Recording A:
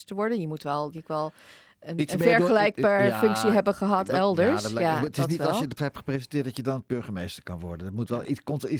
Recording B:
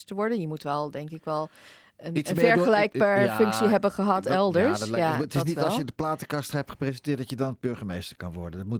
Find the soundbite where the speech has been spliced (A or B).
A